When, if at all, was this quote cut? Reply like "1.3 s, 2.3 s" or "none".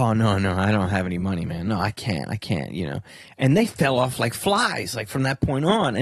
none